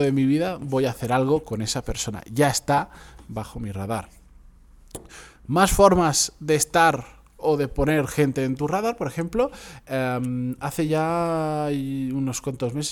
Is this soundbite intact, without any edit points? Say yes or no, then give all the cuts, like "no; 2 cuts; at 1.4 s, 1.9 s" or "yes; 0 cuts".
yes; 0 cuts